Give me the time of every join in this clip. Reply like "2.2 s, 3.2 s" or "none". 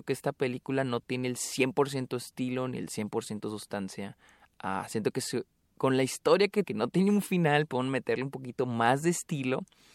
6.6 s